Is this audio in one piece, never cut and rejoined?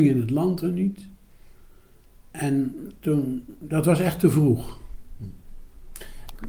yes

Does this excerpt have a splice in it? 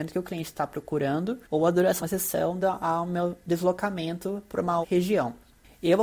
yes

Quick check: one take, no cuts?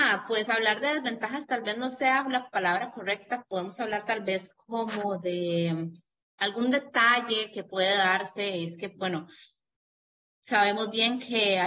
yes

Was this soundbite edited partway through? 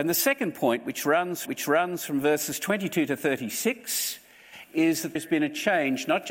yes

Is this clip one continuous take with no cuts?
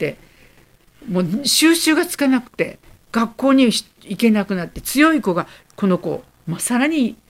yes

